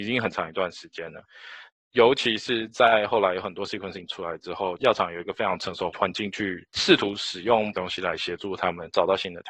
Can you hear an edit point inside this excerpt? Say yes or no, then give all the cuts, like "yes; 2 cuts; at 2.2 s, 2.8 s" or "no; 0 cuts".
yes; 2 cuts; at 4.1 s, 7.7 s